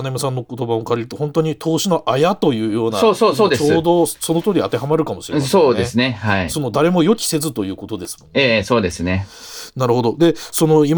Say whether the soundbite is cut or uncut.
uncut